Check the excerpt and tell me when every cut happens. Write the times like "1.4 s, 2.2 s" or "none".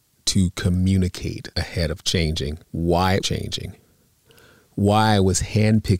1.5 s, 2.0 s, 2.6 s, 3.2 s